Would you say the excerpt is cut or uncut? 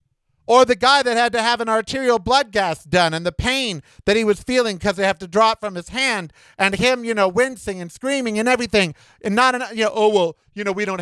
uncut